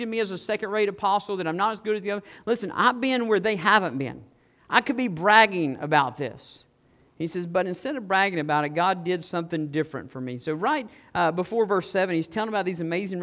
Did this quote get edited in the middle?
no; 0 cuts

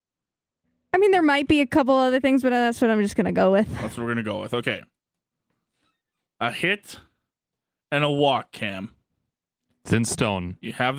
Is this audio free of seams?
yes; 0 cuts

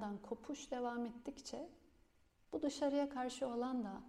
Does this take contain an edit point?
no; 0 cuts

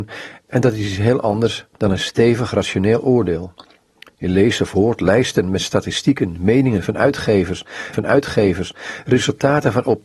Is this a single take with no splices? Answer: no; 1 cut; at 7.9 s

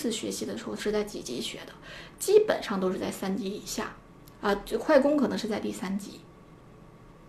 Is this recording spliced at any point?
no; 0 cuts

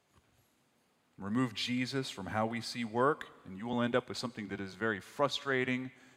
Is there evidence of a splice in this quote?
no; 0 cuts

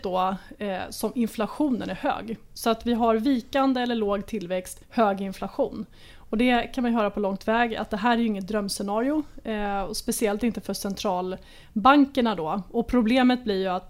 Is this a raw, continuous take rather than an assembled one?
no; 1 cut; at 4.8 s

